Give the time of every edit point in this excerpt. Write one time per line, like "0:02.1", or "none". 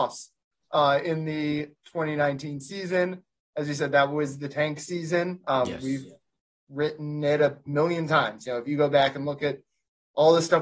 none